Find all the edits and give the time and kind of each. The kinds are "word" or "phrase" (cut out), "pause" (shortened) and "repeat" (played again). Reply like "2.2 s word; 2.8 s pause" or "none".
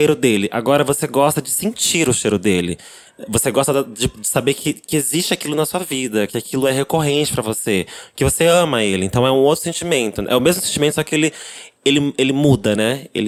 none